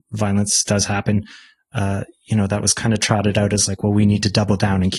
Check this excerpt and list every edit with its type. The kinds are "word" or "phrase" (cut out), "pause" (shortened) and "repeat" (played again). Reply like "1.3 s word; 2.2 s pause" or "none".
none